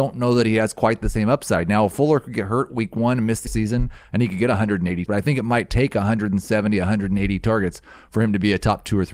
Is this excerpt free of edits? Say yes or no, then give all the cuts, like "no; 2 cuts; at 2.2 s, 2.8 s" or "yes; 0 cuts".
no; 2 cuts; at 3.5 s, 5.1 s